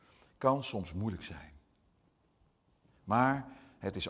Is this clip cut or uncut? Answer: uncut